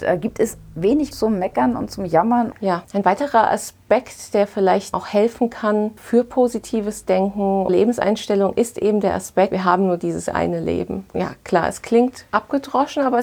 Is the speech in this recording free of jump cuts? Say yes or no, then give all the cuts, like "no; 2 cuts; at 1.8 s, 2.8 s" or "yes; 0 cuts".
no; 2 cuts; at 1.1 s, 7.7 s